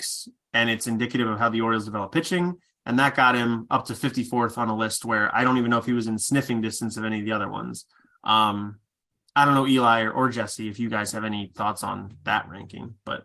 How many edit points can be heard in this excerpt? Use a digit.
0